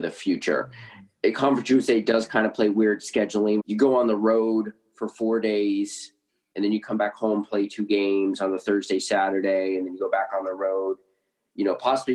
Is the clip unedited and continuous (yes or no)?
no